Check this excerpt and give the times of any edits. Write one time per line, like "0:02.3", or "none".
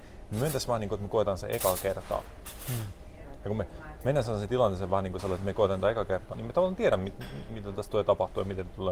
0:06.3